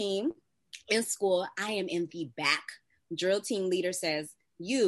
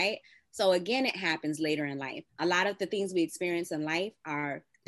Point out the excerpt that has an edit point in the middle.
second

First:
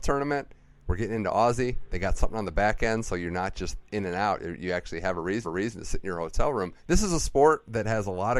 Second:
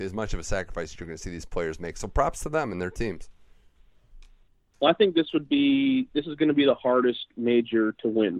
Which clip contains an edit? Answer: first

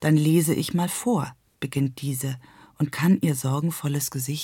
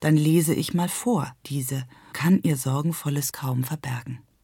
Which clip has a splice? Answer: second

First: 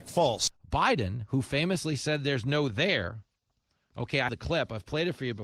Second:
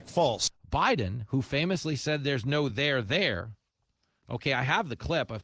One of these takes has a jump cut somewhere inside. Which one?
first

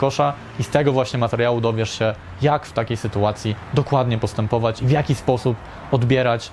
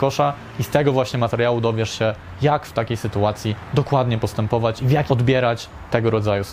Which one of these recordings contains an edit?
second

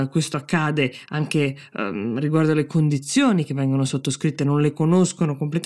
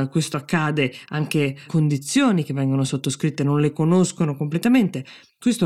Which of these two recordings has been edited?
second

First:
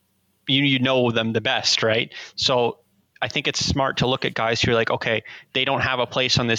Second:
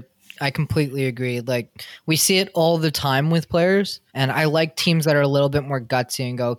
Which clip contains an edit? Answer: second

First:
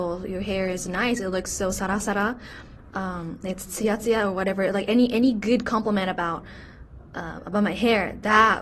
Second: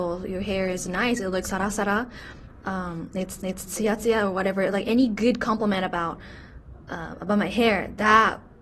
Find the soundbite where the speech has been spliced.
second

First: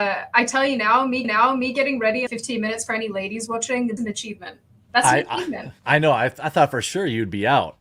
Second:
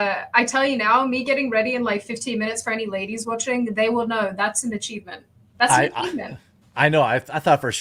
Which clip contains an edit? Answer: first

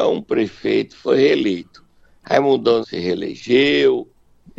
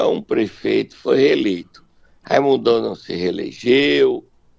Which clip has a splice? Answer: first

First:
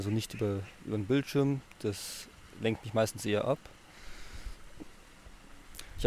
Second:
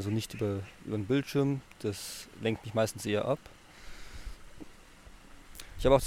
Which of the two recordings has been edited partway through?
second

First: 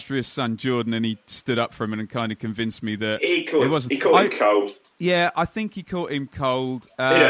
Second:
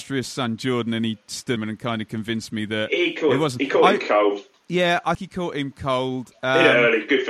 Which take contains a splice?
second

